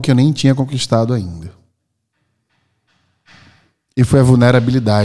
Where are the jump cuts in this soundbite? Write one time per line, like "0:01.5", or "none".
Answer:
none